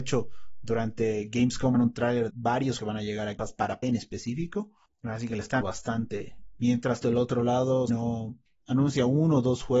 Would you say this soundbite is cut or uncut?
cut